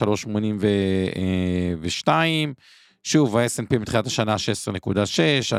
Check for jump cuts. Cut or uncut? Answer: uncut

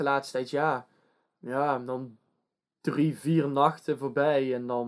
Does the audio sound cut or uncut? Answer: uncut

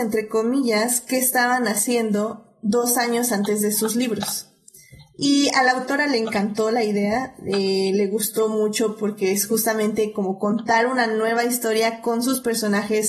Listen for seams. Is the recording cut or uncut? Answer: uncut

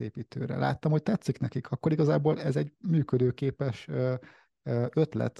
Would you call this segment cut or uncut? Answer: uncut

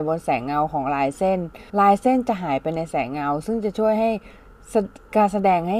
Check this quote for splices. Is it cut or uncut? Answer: cut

